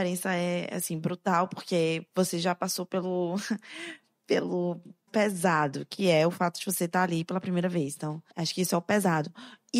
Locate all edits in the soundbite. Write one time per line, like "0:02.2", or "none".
0:05.1
0:08.3